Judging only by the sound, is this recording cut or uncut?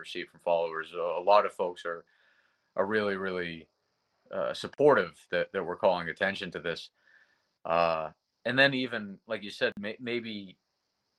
uncut